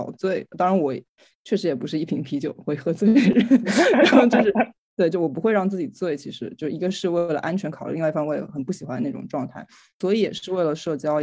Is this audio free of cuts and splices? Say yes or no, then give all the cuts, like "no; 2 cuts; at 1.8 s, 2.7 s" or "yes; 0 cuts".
yes; 0 cuts